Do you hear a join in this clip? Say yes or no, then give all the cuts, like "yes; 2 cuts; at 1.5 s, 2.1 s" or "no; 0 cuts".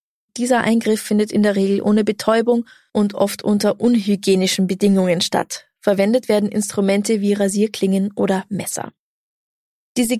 no; 0 cuts